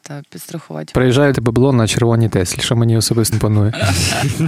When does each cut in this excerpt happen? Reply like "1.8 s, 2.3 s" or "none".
1.3 s, 3.3 s